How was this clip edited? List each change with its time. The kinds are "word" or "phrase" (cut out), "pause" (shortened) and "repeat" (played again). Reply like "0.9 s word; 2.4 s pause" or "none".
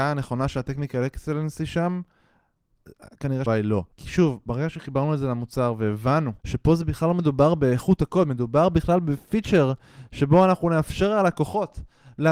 3.5 s word; 3.9 s pause; 6.4 s pause